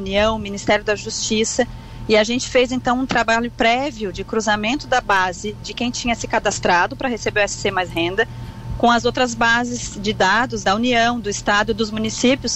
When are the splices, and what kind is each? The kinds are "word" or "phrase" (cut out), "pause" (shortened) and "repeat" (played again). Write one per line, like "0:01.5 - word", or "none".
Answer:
0:10.6 - word